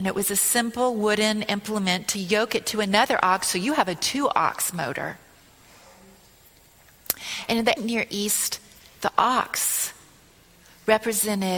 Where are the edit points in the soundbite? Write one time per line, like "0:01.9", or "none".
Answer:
0:07.8